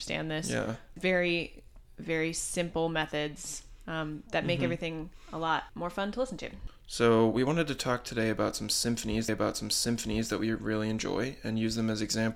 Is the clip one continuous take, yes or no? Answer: no